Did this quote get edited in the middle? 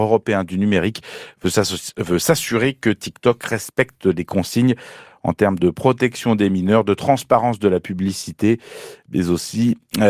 no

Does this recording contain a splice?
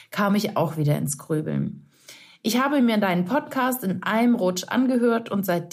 no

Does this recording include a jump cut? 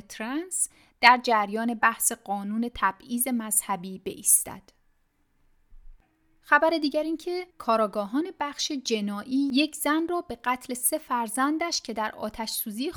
yes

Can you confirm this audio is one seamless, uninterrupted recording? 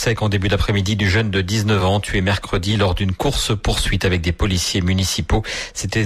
yes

